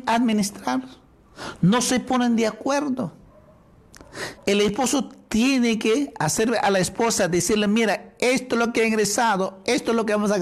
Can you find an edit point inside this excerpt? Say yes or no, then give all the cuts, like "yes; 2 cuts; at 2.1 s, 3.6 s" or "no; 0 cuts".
yes; 1 cut; at 4.4 s